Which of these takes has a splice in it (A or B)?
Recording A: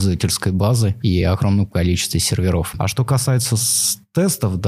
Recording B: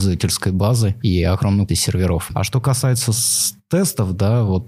B